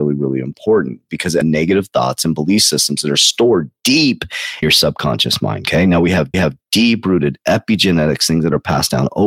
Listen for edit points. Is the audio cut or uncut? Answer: cut